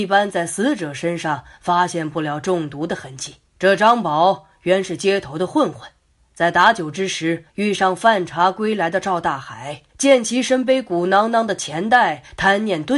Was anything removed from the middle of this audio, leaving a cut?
yes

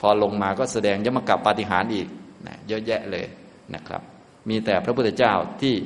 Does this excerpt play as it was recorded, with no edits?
yes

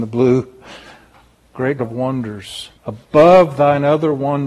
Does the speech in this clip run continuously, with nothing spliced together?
no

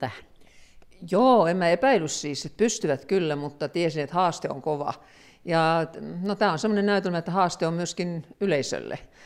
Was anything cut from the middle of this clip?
no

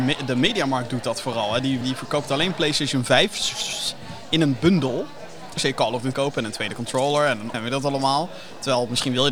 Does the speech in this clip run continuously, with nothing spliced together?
no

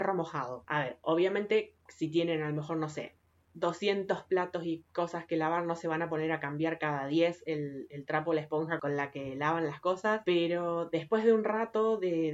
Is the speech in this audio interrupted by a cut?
no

